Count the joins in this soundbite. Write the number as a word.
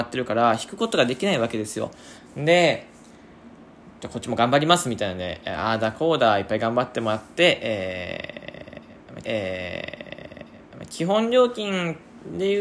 two